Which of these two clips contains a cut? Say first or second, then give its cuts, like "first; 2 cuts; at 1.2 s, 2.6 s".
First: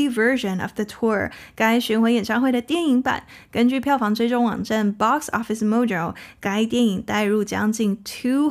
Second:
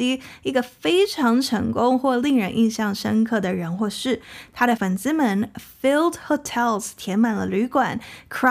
second; 1 cut; at 4.8 s